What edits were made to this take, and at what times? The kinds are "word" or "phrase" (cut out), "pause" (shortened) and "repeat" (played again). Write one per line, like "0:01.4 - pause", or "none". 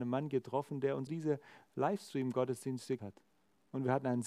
0:01.1 - word
0:03.0 - word

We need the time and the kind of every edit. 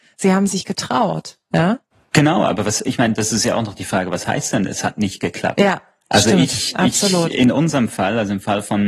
none

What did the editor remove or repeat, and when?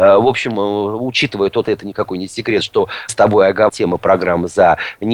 0:01.6 - word
0:03.1 - word
0:03.7 - word

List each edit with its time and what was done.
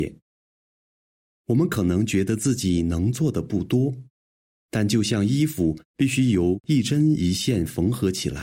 none

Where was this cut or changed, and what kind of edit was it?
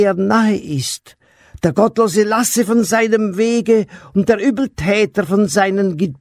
none

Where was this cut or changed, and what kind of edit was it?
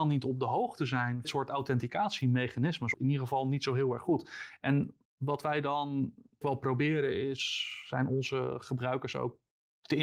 0:01.2 - phrase
0:02.9 - word
0:05.0 - pause
0:06.4 - word

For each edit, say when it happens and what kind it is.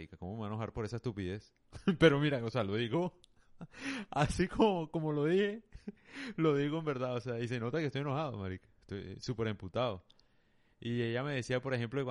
none

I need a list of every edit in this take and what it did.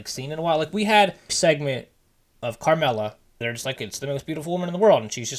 0:01.3 - word
0:03.4 - word
0:03.8 - word

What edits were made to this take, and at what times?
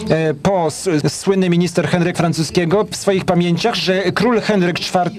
0:01.0 - word
0:02.1 - word
0:02.9 - word

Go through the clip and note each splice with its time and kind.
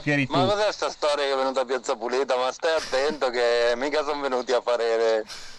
none

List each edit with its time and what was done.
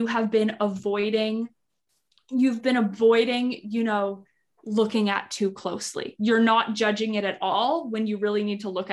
none

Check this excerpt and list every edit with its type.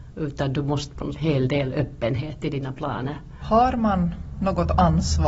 0:01.2 - phrase

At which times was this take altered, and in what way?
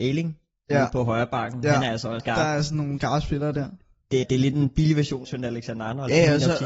0:02.2 - word
0:03.0 - word
0:04.2 - word
0:05.2 - word

